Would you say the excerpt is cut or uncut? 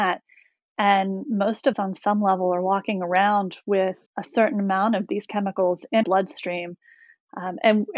cut